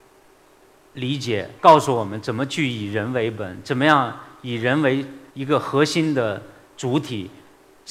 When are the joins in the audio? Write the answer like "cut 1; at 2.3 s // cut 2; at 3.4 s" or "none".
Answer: cut 1; at 1.6 s // cut 2; at 5.3 s

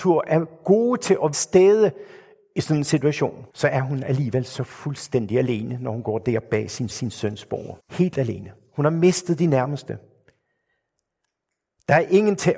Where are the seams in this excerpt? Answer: cut 1; at 1.3 s // cut 2; at 3.5 s // cut 3; at 6.9 s // cut 4; at 7.8 s

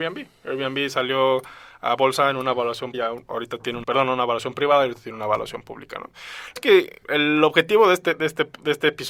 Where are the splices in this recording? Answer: cut 1; at 2.9 s // cut 2; at 3.8 s // cut 3; at 6.6 s // cut 4; at 7.0 s

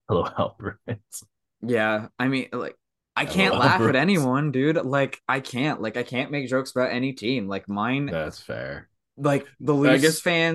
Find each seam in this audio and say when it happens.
none

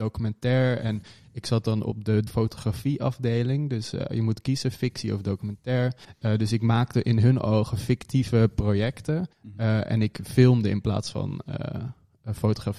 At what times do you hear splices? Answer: cut 1; at 2.3 s // cut 2; at 6.0 s // cut 3; at 9.3 s

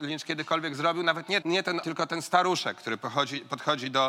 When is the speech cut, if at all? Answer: cut 1; at 1.4 s // cut 2; at 1.8 s

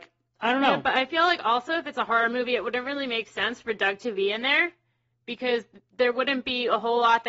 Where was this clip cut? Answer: none

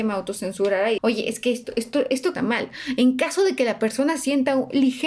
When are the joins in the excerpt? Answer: cut 1; at 1.0 s // cut 2; at 2.3 s

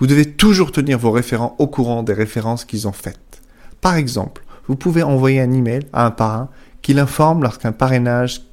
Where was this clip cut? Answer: none

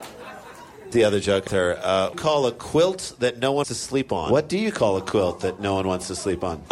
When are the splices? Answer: cut 1; at 0.9 s // cut 2; at 1.5 s // cut 3; at 2.1 s // cut 4; at 3.6 s

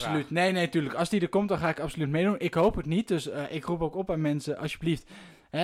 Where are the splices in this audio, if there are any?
none

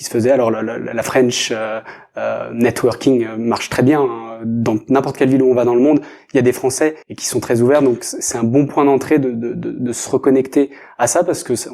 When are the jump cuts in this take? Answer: cut 1; at 7.0 s

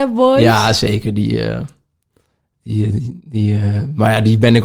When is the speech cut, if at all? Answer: none

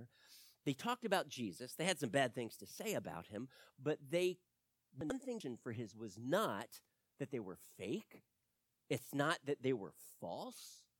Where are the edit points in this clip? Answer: cut 1; at 5.9 s

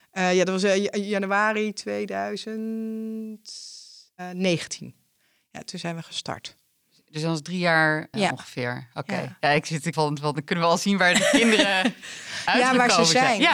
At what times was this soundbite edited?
cut 1; at 8.1 s // cut 2; at 9.9 s

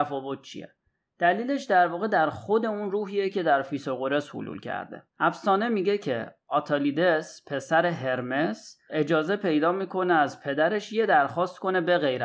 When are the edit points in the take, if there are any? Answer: cut 1; at 5.1 s

